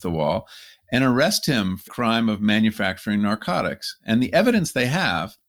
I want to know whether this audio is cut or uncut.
cut